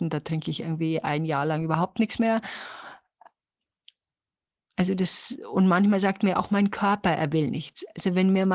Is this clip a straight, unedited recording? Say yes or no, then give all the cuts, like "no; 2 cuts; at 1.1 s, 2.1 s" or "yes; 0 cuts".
yes; 0 cuts